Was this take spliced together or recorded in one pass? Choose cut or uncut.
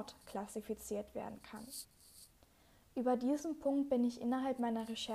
uncut